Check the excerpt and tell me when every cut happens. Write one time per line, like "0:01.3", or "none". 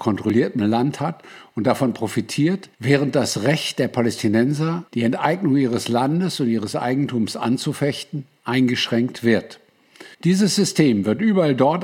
0:02.7
0:04.9
0:10.1